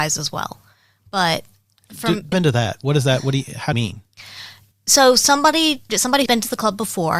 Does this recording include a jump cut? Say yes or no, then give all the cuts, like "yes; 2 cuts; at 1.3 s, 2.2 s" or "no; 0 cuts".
yes; 4 cuts; at 2.3 s, 3.7 s, 5.9 s, 6.3 s